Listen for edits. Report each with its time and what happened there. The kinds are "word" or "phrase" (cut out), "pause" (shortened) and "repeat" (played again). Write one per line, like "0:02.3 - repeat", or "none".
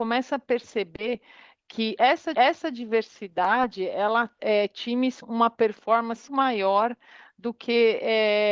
0:02.3 - repeat
0:04.4 - word
0:05.2 - word
0:06.3 - word